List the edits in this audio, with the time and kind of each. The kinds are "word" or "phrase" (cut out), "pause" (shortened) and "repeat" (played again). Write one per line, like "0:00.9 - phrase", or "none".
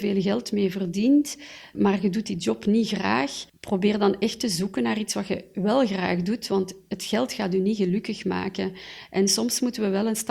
0:01.7 - word
0:03.5 - pause

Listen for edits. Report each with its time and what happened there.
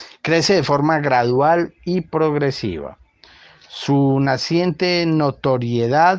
none

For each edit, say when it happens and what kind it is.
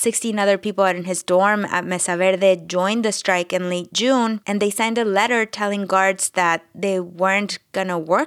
none

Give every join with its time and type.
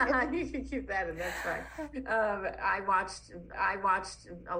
0:03.5 - repeat

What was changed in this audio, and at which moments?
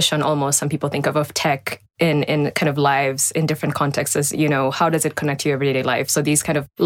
none

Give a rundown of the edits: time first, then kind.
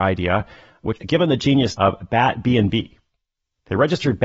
0:01.0 - word
0:01.7 - word

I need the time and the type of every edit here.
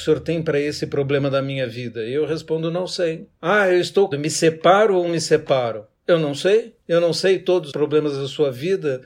0:03.4 - pause
0:04.1 - word
0:05.1 - word
0:05.9 - pause
0:06.8 - pause
0:07.7 - word

